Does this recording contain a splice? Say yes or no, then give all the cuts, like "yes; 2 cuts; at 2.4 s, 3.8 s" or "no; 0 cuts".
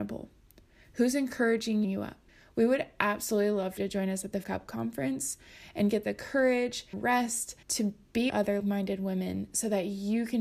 yes; 8 cuts; at 1.8 s, 2.3 s, 3.8 s, 4.4 s, 6.9 s, 7.6 s, 8.3 s, 8.6 s